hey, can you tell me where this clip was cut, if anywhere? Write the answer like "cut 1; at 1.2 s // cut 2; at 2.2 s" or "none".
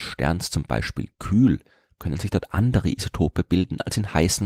none